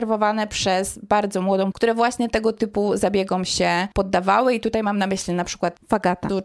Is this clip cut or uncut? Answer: cut